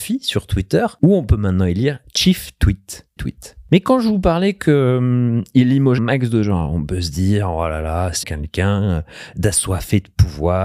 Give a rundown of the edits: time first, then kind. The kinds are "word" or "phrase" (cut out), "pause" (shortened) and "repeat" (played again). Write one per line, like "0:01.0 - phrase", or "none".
0:03.2 - phrase
0:06.0 - word
0:08.2 - word